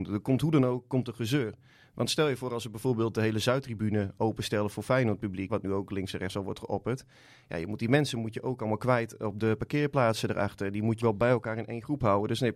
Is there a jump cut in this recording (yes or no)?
yes